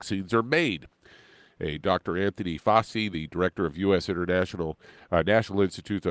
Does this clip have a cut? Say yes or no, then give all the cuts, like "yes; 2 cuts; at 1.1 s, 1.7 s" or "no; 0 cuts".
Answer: no; 0 cuts